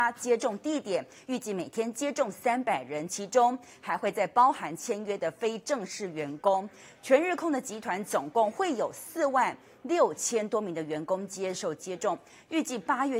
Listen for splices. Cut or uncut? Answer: uncut